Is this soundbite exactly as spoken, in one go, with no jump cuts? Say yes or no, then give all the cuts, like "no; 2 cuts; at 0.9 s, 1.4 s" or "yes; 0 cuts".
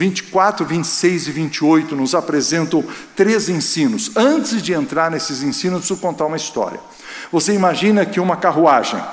yes; 0 cuts